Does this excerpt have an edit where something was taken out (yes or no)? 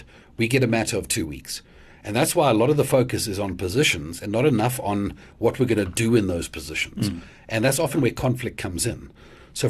no